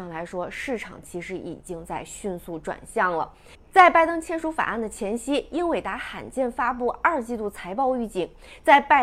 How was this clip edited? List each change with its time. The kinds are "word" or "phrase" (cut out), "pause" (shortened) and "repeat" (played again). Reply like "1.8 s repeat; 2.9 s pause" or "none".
none